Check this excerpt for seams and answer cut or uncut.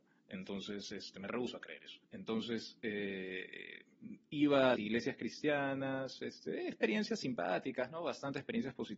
cut